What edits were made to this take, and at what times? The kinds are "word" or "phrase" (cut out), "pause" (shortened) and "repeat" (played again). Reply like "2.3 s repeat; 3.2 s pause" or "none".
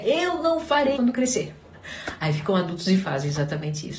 1.0 s word